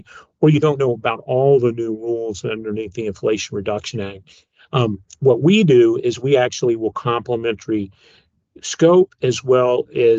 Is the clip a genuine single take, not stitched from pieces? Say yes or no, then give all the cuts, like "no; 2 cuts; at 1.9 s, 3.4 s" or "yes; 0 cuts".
yes; 0 cuts